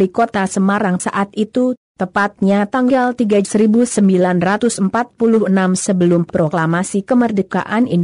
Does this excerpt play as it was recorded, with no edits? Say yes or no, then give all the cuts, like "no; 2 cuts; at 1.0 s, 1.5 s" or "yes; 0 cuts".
no; 2 cuts; at 1.0 s, 3.4 s